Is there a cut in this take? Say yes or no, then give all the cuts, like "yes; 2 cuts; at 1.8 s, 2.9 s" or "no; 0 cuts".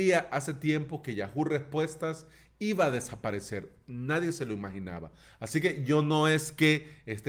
no; 0 cuts